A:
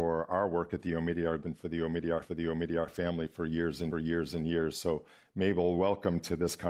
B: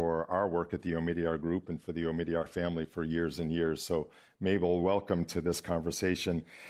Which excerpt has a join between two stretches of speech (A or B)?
A